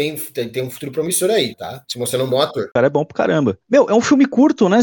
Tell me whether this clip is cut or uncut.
cut